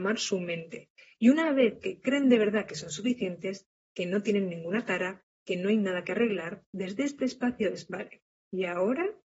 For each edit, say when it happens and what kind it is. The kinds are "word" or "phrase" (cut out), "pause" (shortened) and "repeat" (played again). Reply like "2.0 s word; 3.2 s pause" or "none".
none